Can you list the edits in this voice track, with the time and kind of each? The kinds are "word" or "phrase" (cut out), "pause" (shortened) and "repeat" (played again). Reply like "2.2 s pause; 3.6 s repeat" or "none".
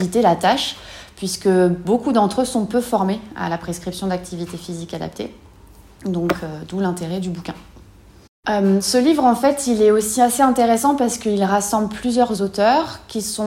none